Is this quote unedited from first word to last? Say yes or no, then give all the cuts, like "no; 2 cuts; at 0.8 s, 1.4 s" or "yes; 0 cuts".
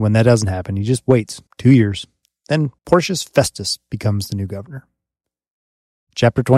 no; 2 cuts; at 1.5 s, 2.8 s